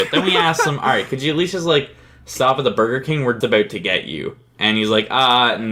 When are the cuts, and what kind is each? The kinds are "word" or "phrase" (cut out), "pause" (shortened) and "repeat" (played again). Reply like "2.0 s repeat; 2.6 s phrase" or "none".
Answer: 3.4 s word